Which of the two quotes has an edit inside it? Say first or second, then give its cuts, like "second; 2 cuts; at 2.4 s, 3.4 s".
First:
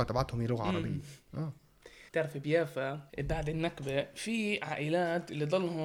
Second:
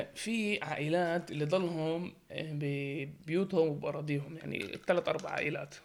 first; 2 cuts; at 2.1 s, 3.1 s